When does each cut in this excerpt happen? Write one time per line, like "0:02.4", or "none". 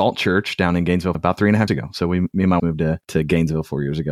0:01.1
0:01.7
0:02.6
0:03.0